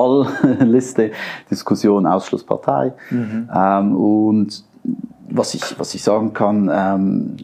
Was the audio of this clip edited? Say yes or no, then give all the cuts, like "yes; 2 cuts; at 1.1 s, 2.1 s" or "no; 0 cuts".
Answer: no; 0 cuts